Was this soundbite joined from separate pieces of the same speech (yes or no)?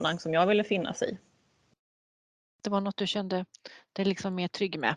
no